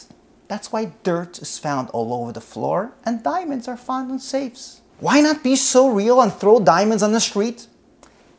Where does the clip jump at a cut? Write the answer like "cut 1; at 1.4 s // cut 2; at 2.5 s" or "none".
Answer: cut 1; at 4.9 s